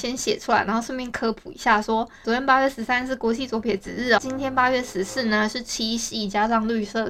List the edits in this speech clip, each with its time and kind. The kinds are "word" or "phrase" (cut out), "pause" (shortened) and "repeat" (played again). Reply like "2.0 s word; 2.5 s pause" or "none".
2.2 s word; 4.2 s word